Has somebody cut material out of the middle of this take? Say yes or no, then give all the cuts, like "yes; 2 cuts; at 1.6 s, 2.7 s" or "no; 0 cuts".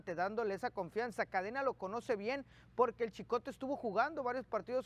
no; 0 cuts